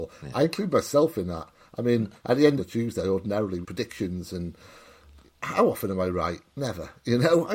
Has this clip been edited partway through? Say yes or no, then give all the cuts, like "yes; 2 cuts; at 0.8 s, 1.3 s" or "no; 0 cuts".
yes; 3 cuts; at 2.2 s, 2.6 s, 3.6 s